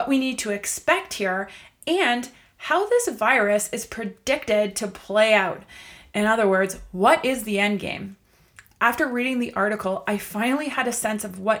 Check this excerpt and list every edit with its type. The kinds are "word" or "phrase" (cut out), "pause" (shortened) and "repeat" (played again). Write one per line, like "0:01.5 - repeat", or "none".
none

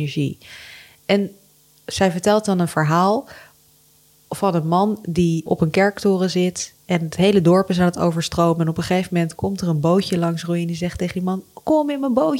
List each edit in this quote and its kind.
0:05.5 - word

